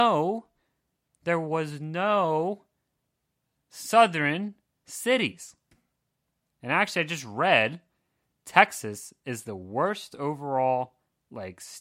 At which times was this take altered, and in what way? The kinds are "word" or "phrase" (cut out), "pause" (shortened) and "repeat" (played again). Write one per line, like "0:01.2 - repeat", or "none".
none